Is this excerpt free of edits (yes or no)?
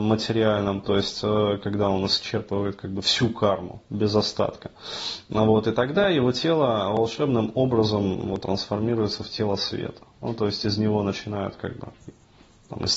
yes